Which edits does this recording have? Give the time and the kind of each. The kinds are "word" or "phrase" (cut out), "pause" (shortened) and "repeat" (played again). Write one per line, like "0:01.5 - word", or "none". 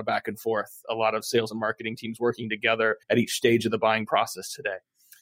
0:03.0 - pause